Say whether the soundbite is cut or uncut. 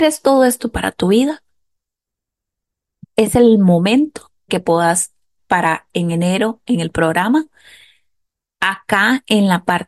cut